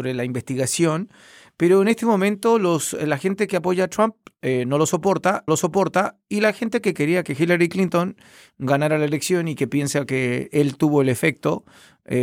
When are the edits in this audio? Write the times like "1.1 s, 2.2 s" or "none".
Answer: 5.5 s